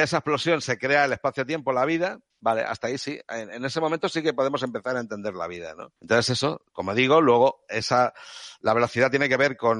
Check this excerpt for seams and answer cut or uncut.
cut